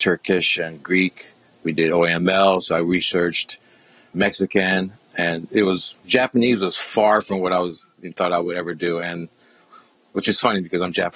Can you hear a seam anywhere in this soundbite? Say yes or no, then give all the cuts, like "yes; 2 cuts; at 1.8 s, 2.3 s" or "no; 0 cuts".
no; 0 cuts